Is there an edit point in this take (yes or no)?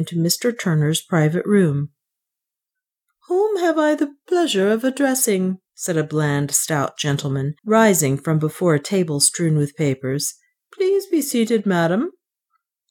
yes